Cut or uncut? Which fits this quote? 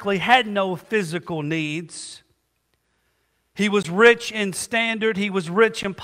uncut